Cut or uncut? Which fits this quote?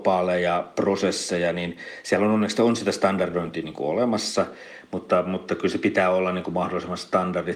uncut